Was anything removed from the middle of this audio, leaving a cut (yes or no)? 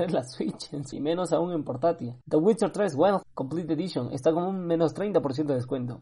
yes